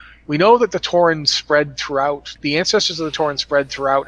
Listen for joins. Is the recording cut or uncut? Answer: cut